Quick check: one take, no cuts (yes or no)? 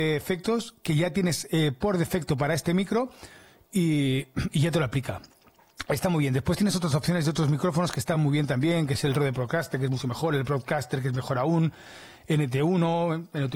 yes